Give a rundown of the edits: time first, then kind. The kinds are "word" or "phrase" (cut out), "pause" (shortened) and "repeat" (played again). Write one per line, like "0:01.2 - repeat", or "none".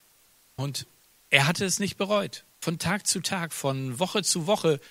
0:02.5 - pause